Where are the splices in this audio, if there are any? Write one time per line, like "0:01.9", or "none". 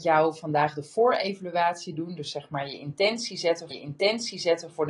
0:03.7